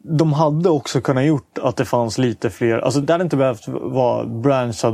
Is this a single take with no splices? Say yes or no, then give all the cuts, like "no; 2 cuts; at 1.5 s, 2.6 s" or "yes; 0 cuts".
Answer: no; 1 cut; at 3.0 s